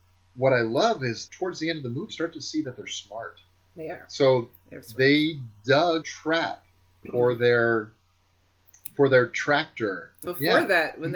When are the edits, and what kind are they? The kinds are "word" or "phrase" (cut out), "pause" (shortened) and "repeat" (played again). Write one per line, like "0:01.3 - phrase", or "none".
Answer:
0:01.3 - word
0:02.1 - word
0:04.8 - word
0:06.0 - word
0:07.0 - word
0:10.3 - word